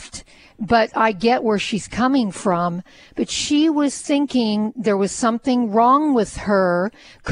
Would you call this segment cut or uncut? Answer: uncut